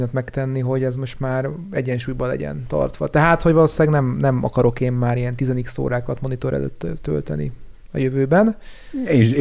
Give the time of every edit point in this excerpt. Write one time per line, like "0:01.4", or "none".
none